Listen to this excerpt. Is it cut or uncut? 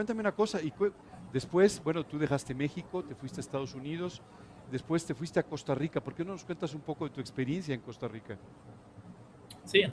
uncut